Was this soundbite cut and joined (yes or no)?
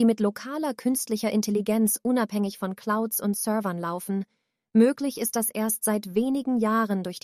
no